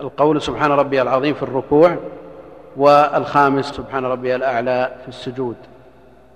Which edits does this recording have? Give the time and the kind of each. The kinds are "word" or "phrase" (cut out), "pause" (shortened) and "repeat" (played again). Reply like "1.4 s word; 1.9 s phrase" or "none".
3.7 s word